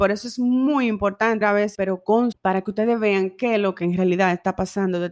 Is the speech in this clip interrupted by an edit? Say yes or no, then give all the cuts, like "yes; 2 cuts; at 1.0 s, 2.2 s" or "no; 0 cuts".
yes; 3 cuts; at 1.4 s, 1.7 s, 2.3 s